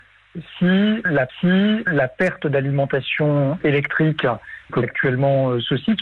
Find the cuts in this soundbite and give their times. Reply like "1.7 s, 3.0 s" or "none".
1.3 s, 4.8 s